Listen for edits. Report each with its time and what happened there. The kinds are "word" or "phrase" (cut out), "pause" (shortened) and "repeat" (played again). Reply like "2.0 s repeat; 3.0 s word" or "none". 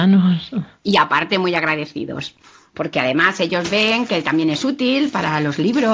none